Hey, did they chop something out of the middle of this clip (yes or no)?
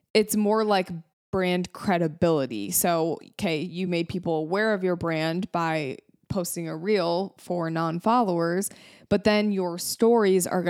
no